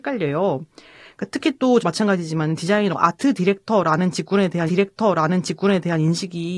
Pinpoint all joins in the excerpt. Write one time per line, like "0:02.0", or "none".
0:01.8
0:02.9
0:04.7